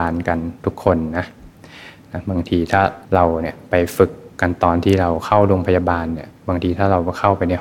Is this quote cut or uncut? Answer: cut